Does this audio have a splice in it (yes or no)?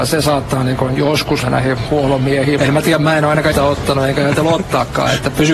yes